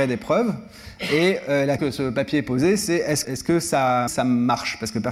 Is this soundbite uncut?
no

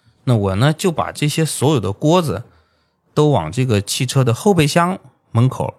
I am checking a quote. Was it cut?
no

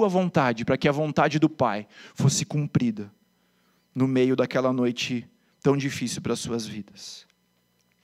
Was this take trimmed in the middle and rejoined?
no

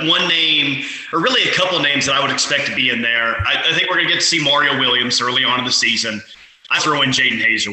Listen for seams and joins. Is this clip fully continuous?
no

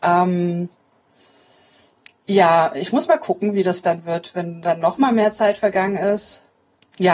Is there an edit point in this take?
no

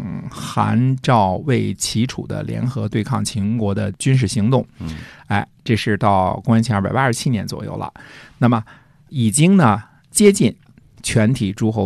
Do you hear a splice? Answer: no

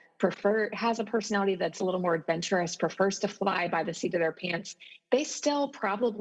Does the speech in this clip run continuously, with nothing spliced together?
yes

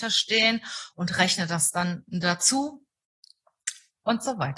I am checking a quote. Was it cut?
no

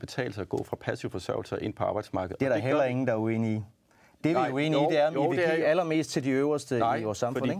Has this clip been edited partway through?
no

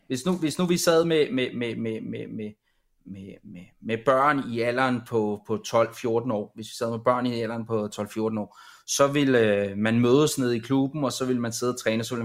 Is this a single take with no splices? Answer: yes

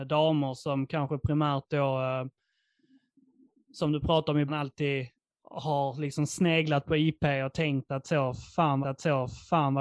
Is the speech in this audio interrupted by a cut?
yes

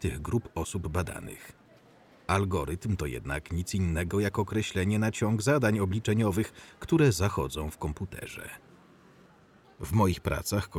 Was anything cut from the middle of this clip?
no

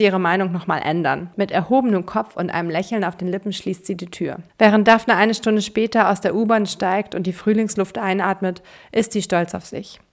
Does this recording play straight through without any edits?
no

